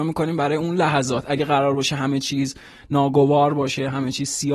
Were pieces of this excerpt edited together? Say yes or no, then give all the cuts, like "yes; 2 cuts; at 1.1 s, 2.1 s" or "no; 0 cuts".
no; 0 cuts